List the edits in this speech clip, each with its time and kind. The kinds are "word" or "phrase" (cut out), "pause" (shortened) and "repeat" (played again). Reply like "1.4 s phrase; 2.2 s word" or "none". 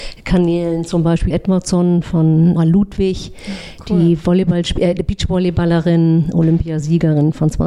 1.3 s word; 2.6 s phrase